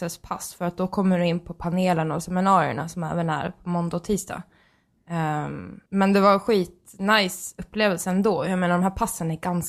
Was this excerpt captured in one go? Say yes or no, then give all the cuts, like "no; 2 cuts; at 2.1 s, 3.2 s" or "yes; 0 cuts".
no; 1 cut; at 5.9 s